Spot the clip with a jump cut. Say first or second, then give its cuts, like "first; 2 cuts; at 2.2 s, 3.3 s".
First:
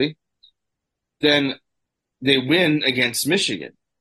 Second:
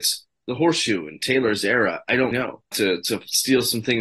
second; 2 cuts; at 2.3 s, 2.7 s